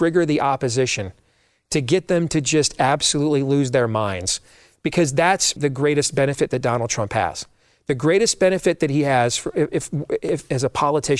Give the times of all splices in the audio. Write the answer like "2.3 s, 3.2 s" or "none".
5.6 s

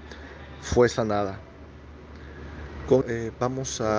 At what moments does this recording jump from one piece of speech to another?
3.0 s

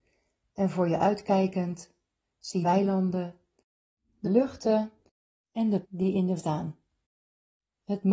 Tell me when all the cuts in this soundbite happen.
2.6 s, 4.2 s, 5.8 s, 6.4 s

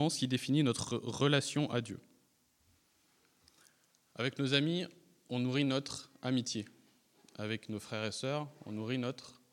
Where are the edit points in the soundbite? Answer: none

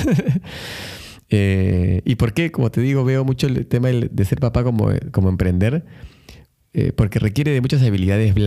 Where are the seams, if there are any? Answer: none

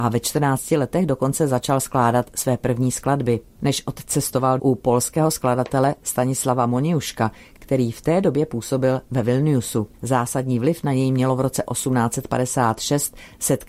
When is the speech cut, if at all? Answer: 3.5 s, 4.6 s, 9.9 s

